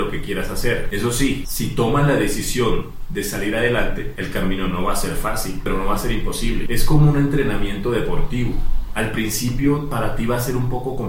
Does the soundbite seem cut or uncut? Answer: uncut